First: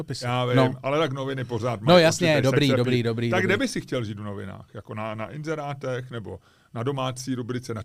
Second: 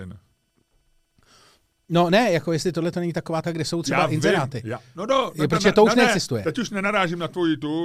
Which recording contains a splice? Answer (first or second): second